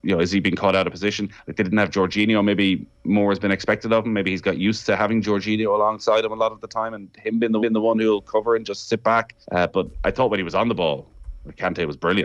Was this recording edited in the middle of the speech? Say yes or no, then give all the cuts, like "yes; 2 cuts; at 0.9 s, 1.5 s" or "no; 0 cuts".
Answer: yes; 2 cuts; at 7.6 s, 9.4 s